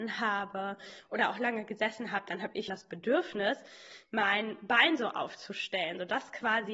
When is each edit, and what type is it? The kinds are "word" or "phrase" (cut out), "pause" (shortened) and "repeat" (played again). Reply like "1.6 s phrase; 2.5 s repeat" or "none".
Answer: 2.7 s word